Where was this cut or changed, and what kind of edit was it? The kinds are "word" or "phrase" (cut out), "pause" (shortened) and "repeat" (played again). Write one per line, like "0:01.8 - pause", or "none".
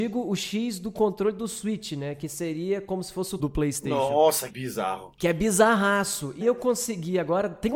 0:03.4 - word
0:04.5 - word
0:06.4 - word